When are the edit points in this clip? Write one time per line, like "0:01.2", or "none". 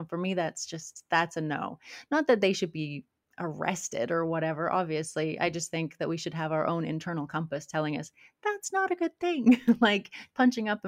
none